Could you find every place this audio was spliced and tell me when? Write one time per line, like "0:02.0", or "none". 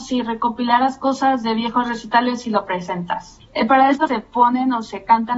0:04.1